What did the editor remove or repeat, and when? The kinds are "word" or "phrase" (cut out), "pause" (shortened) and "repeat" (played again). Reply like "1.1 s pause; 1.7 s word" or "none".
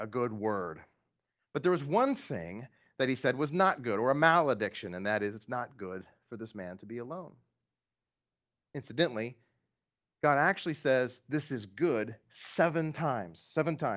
none